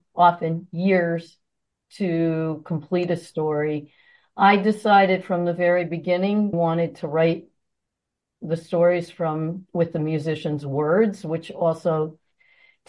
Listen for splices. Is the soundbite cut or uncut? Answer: cut